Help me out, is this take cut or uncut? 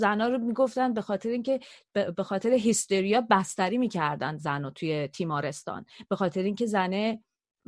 uncut